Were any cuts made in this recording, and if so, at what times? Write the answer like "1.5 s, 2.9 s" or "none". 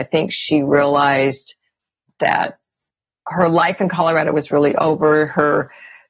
none